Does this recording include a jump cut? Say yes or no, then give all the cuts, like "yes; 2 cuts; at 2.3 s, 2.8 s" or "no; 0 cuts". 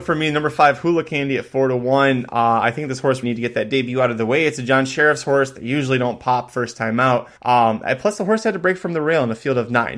yes; 2 cuts; at 3.2 s, 7.4 s